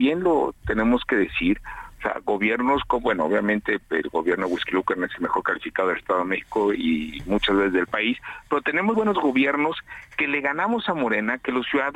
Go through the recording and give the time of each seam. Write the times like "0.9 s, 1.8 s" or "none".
8.9 s